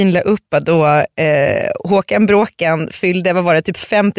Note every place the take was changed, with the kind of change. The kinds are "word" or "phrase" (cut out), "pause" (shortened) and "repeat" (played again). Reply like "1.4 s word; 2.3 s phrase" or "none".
none